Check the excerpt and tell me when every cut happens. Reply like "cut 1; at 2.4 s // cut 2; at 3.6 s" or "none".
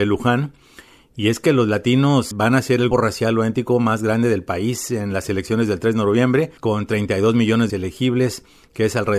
cut 1; at 2.3 s // cut 2; at 2.9 s // cut 3; at 6.6 s // cut 4; at 7.7 s